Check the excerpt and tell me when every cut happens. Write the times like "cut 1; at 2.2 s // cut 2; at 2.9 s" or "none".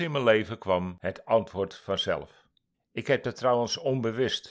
cut 1; at 2.7 s